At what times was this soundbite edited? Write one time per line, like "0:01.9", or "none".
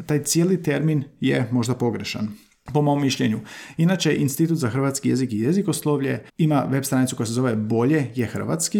0:06.3